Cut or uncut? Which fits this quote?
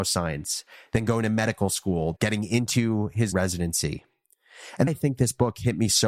cut